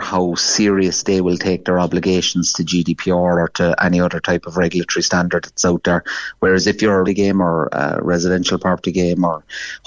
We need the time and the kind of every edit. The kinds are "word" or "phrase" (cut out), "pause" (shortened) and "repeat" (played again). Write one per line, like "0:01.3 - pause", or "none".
0:07.1 - phrase